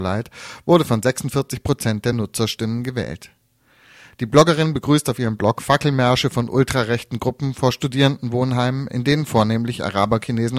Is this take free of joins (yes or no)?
yes